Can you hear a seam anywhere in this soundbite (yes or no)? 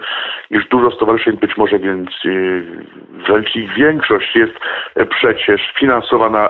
yes